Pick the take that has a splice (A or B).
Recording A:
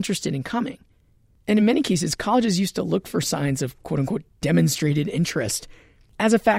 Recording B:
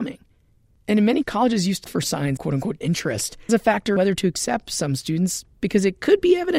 B